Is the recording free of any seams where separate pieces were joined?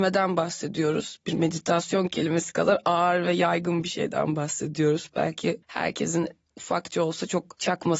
yes; 0 cuts

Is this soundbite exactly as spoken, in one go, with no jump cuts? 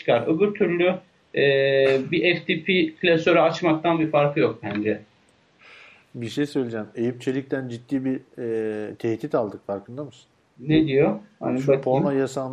yes; 0 cuts

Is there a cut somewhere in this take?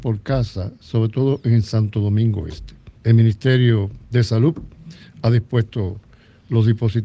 yes; 2 cuts; at 3.0 s, 4.0 s

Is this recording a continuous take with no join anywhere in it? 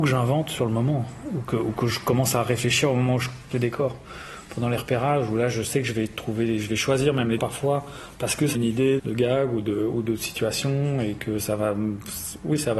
no; 4 cuts; at 3.5 s, 7.4 s, 8.5 s, 9.0 s

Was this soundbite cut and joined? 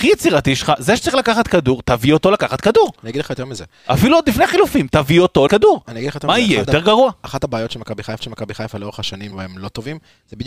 yes; 3 cuts; at 5.5 s, 8.2 s, 9.3 s

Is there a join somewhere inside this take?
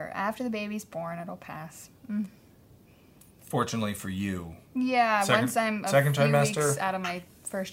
no; 0 cuts

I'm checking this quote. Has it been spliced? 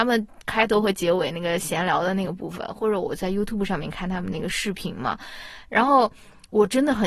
no; 0 cuts

